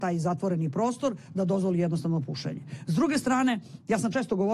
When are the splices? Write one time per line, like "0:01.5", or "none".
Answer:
none